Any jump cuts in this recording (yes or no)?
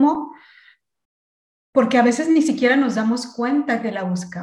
no